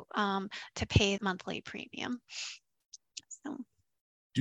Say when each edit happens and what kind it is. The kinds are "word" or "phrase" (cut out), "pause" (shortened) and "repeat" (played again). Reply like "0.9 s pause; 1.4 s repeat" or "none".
1.2 s word